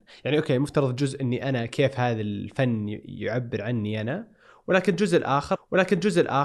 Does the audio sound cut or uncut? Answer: cut